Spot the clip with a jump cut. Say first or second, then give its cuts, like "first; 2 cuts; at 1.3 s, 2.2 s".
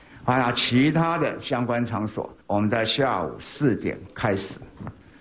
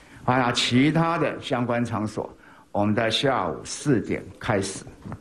first; 1 cut; at 2.4 s